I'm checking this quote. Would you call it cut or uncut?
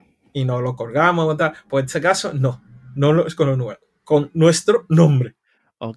uncut